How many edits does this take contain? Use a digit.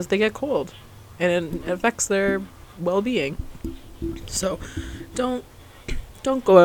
0